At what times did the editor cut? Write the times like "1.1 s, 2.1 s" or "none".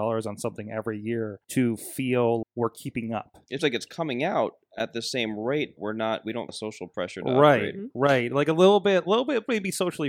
1.4 s, 2.4 s, 3.6 s, 5.8 s, 6.5 s